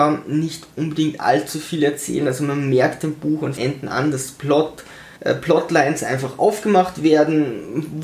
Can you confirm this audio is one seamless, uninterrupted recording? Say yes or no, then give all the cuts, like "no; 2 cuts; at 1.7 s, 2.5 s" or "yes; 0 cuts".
no; 2 cuts; at 3.6 s, 5.2 s